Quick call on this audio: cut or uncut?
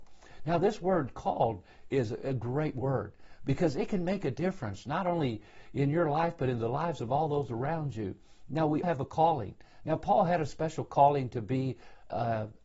cut